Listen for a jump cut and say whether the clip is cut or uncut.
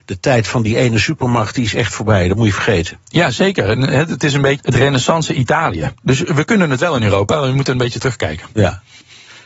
cut